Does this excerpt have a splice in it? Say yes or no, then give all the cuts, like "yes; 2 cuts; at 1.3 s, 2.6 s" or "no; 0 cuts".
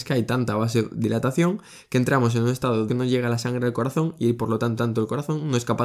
yes; 2 cuts; at 2.9 s, 4.8 s